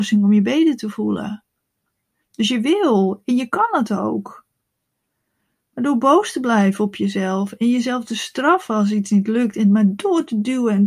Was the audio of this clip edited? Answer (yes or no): no